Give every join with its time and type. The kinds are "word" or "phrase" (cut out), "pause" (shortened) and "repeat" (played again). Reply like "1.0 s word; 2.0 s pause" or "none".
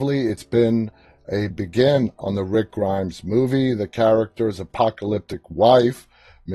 1.5 s phrase